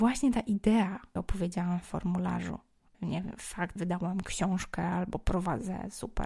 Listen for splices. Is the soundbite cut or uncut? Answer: cut